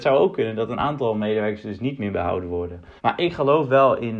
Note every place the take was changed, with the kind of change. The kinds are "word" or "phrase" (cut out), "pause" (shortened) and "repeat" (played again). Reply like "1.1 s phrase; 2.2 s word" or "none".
3.0 s pause